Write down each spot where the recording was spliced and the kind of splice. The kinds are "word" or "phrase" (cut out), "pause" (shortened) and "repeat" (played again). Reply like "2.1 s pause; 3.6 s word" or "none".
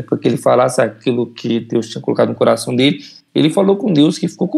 none

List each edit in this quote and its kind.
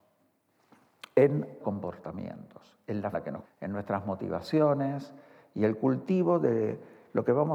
1.6 s word; 3.1 s word; 3.4 s word

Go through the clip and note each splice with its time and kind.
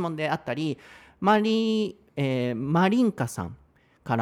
2.1 s pause

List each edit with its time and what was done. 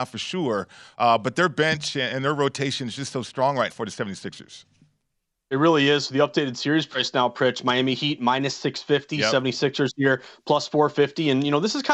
3.7 s word

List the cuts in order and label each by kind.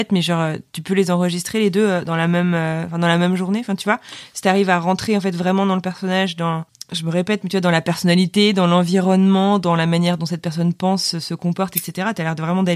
none

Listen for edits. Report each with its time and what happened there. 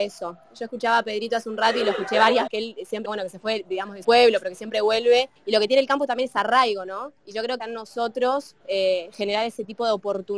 2.5 s phrase; 3.0 s word; 4.0 s word; 5.4 s pause; 7.2 s pause; 7.6 s phrase; 8.6 s pause

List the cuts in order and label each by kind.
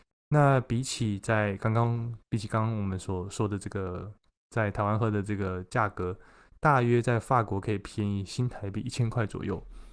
none

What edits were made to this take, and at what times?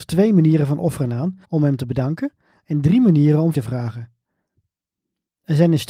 1.4 s pause; 3.5 s word

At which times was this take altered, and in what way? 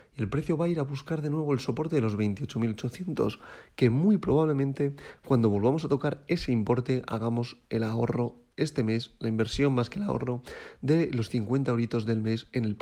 8.5 s pause

